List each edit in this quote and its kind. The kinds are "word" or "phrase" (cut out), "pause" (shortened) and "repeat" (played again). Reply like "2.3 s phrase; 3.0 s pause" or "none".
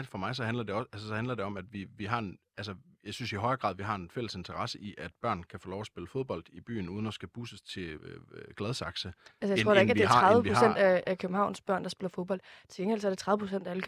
1.7 s word; 8.0 s word